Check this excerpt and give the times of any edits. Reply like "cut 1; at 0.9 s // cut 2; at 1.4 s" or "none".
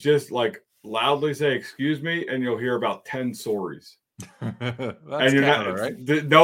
cut 1; at 4.1 s

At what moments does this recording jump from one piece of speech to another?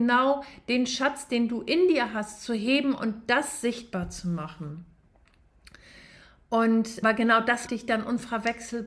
cut 1; at 7.0 s // cut 2; at 7.7 s

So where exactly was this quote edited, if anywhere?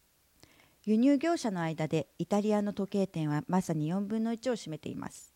none

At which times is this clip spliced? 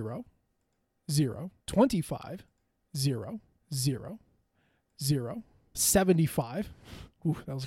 cut 1; at 1.6 s // cut 2; at 3.6 s // cut 3; at 5.7 s

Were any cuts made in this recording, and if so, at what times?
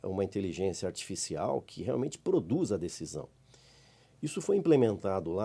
none

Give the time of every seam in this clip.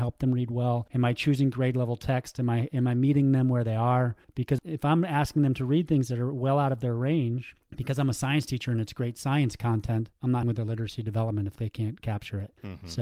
cut 1; at 10.4 s

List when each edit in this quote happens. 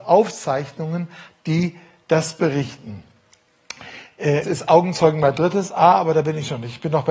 cut 1; at 1.3 s // cut 2; at 4.4 s

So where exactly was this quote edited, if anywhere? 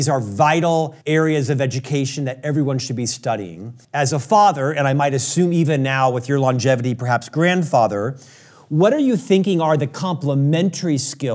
cut 1; at 1.0 s // cut 2; at 3.8 s

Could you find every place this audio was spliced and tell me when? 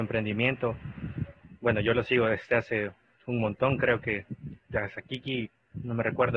none

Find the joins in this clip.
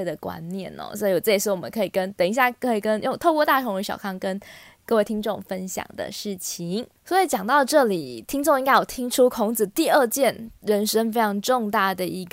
cut 1; at 7.0 s

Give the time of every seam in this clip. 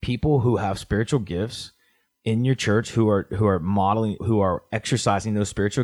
cut 1; at 4.2 s

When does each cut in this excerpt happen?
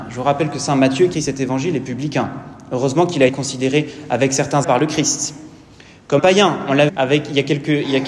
cut 1; at 1.1 s // cut 2; at 3.3 s // cut 3; at 4.6 s // cut 4; at 6.2 s // cut 5; at 6.9 s

